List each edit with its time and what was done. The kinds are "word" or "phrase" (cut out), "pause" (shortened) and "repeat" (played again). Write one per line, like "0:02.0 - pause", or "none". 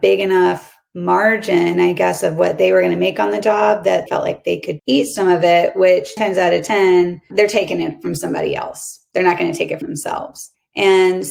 0:04.1 - word
0:04.8 - word
0:06.2 - word
0:09.8 - word